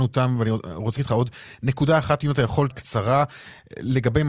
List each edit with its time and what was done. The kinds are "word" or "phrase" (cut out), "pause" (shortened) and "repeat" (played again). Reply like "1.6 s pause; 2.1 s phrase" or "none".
1.0 s word; 2.7 s word